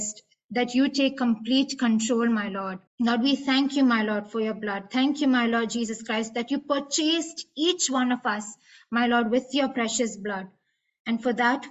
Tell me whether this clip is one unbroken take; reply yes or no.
no